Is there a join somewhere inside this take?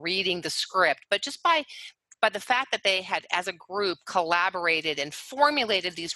no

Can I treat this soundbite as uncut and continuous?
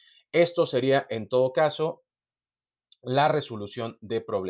yes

